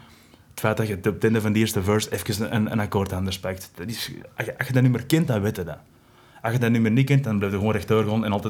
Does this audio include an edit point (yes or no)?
no